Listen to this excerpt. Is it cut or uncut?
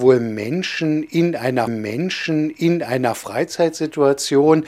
cut